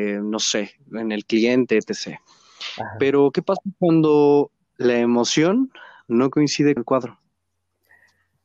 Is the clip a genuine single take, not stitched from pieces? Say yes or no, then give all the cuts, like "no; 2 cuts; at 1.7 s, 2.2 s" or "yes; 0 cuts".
no; 1 cut; at 6.8 s